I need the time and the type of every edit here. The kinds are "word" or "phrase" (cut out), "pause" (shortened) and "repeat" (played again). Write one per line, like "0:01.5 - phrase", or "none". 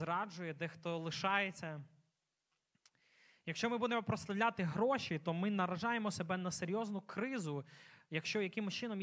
none